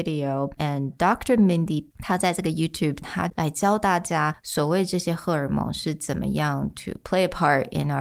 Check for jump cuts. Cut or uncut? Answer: cut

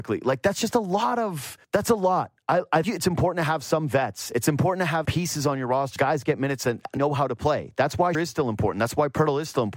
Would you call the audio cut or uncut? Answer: cut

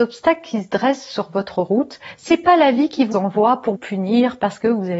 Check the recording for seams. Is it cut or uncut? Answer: cut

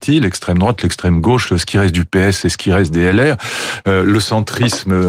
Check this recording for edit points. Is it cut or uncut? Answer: uncut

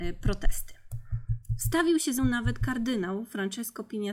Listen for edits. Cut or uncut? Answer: cut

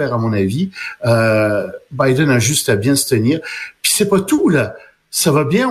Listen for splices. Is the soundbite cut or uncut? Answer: uncut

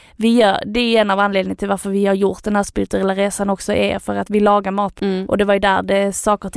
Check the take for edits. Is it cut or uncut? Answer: cut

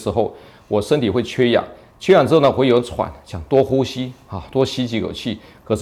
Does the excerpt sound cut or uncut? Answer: uncut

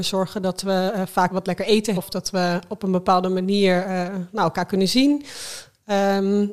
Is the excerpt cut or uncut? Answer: cut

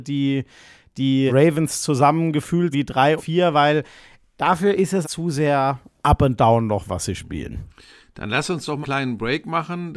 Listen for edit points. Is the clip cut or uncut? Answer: cut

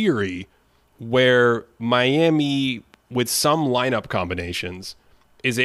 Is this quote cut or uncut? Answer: uncut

